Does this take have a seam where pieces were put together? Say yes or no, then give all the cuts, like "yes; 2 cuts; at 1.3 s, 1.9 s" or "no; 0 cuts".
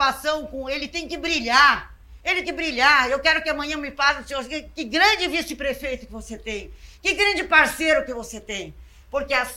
yes; 1 cut; at 2.4 s